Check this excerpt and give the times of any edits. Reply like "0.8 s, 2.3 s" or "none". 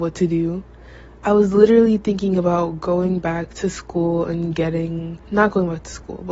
5.2 s